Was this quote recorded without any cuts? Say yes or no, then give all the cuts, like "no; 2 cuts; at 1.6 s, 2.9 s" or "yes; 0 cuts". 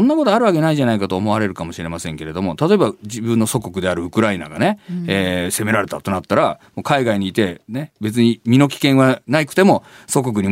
yes; 0 cuts